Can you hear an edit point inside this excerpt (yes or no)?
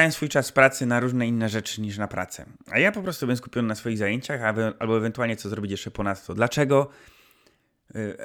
no